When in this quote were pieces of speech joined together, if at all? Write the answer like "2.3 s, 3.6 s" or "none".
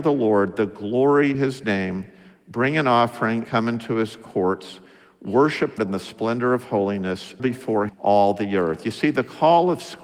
1.3 s, 3.4 s, 5.8 s, 7.4 s, 7.9 s